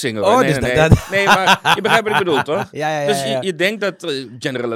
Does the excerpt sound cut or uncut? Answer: uncut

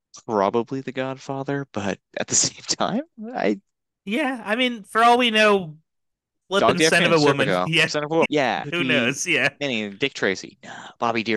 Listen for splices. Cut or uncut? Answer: cut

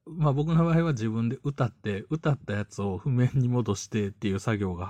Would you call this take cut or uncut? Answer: uncut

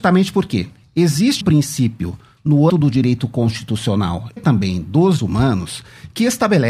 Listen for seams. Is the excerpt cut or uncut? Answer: cut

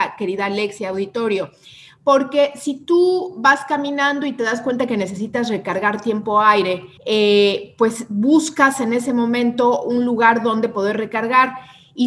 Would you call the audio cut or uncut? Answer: cut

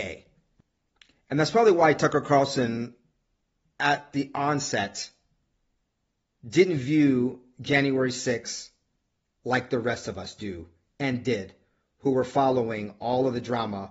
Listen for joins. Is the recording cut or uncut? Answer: uncut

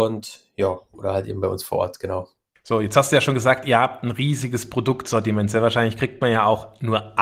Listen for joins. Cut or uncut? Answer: uncut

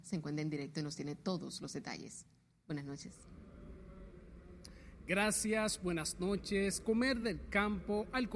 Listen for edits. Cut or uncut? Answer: uncut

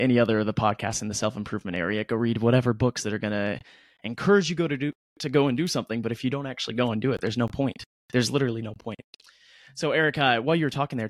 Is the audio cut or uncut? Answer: uncut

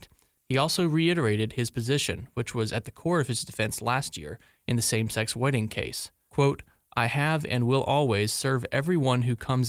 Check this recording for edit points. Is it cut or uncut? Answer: uncut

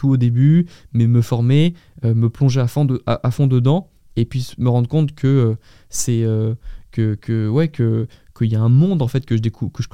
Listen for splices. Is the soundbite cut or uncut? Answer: uncut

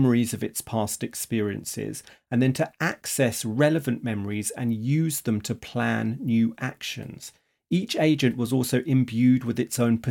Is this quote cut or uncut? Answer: uncut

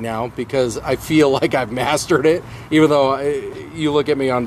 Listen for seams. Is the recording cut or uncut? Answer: uncut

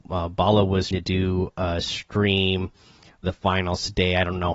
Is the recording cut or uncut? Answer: cut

